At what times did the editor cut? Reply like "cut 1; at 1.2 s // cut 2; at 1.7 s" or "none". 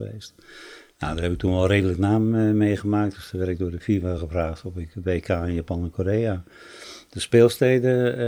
none